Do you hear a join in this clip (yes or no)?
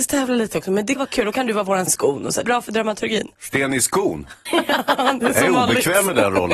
yes